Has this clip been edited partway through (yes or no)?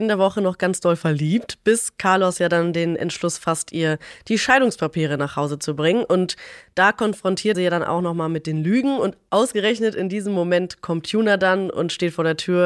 yes